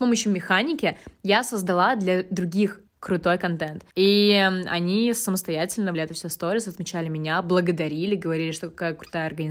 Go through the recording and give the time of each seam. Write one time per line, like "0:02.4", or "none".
0:02.9
0:03.9
0:05.9